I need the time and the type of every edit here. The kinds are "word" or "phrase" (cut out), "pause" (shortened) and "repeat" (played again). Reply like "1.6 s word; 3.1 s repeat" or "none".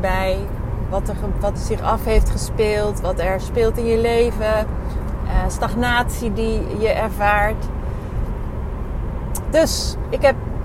1.6 s word